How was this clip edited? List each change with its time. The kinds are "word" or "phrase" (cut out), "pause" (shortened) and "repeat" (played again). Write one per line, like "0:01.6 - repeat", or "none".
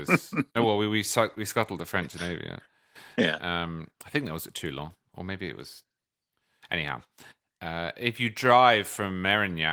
0:03.9 - pause